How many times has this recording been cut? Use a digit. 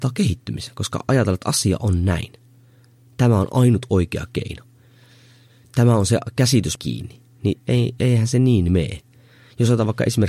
1